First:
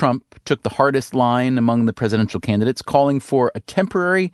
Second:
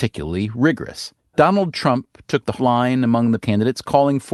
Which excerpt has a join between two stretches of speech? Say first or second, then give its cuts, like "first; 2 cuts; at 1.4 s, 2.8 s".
second; 3 cuts; at 1.2 s, 2.6 s, 3.4 s